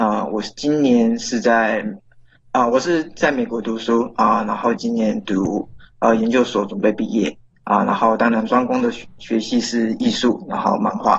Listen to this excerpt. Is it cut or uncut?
uncut